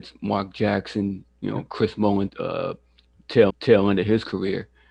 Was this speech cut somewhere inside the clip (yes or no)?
yes